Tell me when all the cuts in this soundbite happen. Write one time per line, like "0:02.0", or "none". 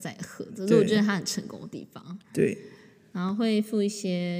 0:02.2